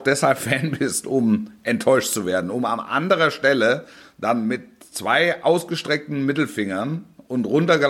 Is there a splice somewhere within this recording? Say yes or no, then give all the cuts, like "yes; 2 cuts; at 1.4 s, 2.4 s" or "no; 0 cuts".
no; 0 cuts